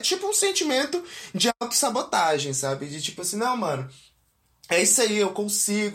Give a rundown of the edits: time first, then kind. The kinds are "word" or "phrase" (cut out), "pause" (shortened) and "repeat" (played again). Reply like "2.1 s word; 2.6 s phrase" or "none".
none